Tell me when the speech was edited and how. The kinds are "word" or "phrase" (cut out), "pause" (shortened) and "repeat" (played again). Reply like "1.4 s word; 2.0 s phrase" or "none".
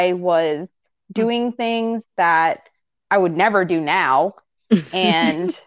none